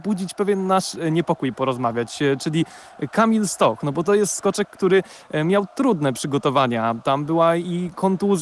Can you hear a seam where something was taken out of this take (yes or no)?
no